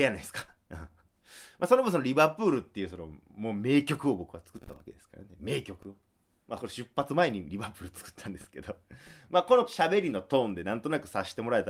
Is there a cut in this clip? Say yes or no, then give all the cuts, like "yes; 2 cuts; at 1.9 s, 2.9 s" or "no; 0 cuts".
no; 0 cuts